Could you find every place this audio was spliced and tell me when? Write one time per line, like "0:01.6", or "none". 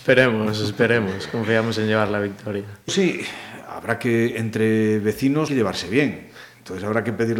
0:02.9
0:05.5

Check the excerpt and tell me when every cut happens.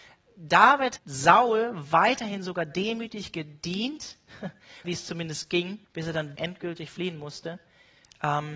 0:01.0
0:04.8
0:05.8
0:06.4

